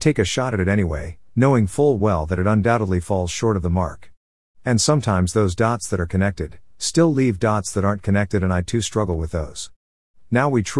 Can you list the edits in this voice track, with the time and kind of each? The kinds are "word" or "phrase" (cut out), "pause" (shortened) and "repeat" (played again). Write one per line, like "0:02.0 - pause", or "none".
none